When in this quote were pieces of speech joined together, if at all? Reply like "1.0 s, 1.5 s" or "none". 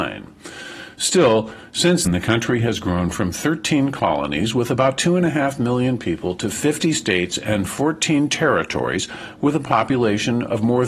2.1 s